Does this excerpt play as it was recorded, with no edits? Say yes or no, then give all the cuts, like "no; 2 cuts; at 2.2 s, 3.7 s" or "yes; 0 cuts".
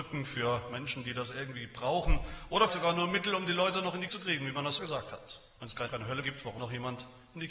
no; 6 cuts; at 2.7 s, 4.1 s, 4.8 s, 5.9 s, 6.2 s, 6.6 s